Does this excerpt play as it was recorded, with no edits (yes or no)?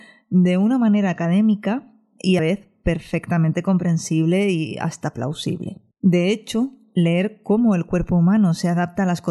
no